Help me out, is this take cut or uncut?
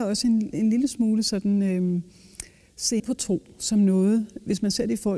cut